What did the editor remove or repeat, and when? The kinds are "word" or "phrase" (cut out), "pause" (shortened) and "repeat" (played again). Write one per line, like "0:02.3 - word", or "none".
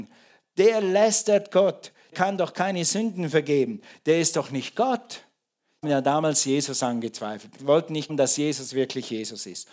0:02.1 - word
0:05.8 - word
0:07.6 - word
0:08.1 - word